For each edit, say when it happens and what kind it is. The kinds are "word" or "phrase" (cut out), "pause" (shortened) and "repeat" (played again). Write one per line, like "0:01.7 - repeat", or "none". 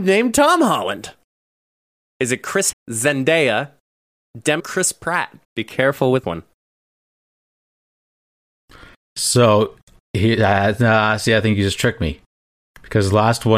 0:02.7 - word
0:04.6 - phrase
0:05.4 - pause
0:06.2 - word